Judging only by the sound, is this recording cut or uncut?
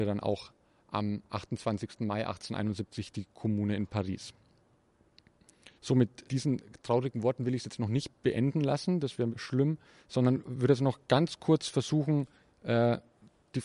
cut